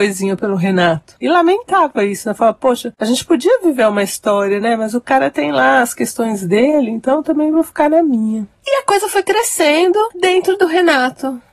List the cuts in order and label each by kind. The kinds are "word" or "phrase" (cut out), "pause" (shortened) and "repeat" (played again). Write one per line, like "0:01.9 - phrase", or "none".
none